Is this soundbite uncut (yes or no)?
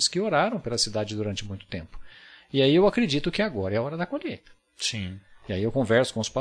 yes